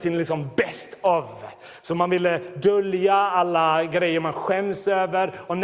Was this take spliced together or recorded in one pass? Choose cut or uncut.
uncut